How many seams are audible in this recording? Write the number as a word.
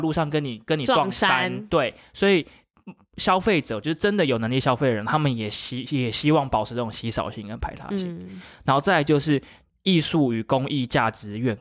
zero